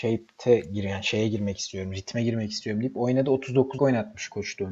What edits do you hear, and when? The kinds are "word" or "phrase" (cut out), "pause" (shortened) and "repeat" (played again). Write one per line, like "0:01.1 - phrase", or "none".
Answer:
0:03.8 - word